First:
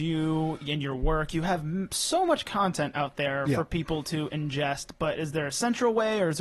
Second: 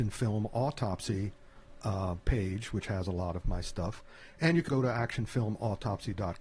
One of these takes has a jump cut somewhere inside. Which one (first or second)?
second